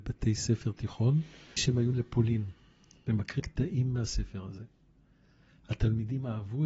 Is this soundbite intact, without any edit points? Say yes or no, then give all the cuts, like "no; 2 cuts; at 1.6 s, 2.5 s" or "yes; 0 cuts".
no; 3 cuts; at 1.6 s, 1.9 s, 3.4 s